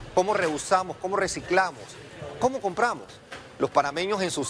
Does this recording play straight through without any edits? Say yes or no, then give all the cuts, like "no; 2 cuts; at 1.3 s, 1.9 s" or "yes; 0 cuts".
yes; 0 cuts